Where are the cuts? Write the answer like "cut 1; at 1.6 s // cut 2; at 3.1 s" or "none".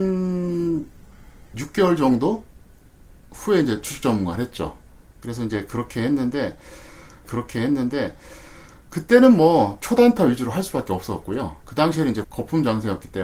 cut 1; at 7.2 s // cut 2; at 12.2 s